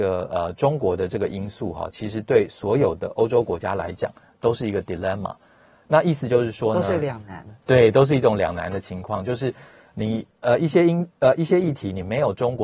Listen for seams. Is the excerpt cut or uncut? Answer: uncut